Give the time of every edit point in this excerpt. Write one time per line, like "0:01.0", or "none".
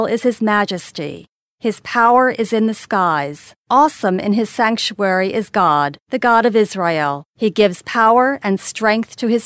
0:01.4
0:03.6
0:06.0
0:07.3

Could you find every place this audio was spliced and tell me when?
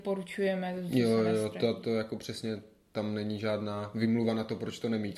none

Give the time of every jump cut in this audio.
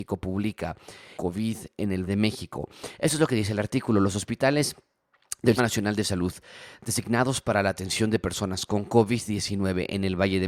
0:01.2
0:02.1
0:05.6

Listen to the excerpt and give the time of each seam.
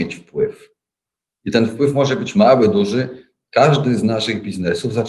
none

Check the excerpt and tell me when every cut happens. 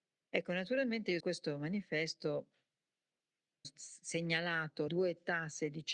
0:01.2
0:03.6
0:04.9

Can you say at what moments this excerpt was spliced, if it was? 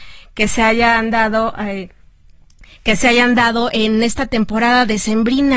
none

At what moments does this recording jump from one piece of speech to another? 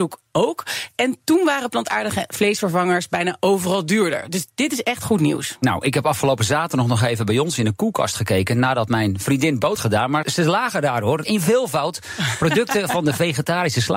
0:09.8
0:10.2

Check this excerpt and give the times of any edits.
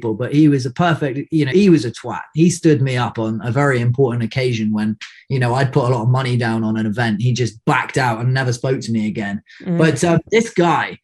0:01.5

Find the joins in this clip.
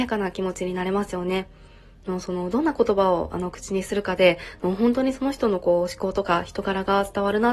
none

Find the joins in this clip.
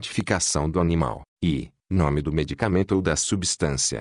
0:01.3

